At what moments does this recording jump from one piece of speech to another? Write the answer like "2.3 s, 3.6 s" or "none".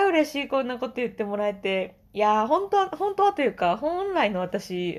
2.0 s